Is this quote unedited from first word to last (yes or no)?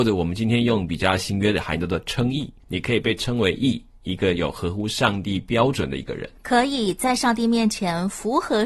no